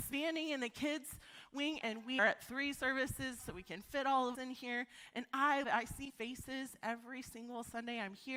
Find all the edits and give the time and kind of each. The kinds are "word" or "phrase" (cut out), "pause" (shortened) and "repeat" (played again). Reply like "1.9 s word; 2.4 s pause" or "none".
1.8 s word; 2.2 s word; 3.4 s word; 4.3 s word; 5.6 s word; 6.1 s word

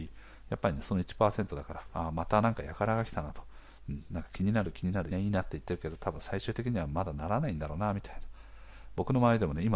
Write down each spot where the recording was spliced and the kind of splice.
5.1 s phrase

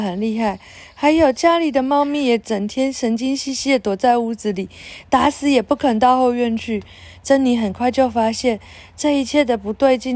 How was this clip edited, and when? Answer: none

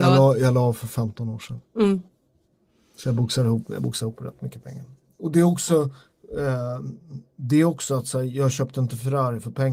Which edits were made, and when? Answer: none

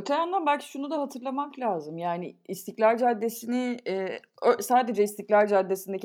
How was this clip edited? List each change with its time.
none

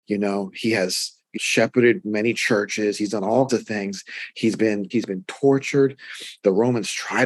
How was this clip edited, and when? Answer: 1.3 s word; 3.5 s word; 4.9 s word

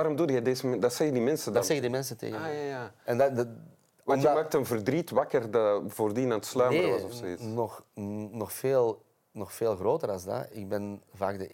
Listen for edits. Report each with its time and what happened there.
none

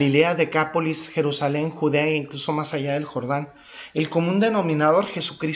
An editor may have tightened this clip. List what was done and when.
none

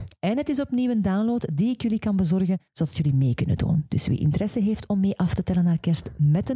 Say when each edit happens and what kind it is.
2.7 s pause

